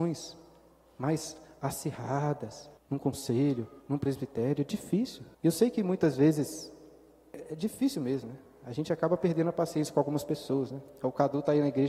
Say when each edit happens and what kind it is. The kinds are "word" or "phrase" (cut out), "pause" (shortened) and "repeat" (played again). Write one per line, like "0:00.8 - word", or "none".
0:02.8 - pause
0:03.8 - pause
0:05.3 - pause